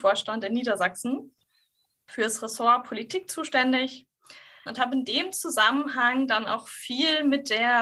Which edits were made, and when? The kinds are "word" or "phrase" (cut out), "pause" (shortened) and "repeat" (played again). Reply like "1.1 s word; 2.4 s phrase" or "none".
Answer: 4.7 s word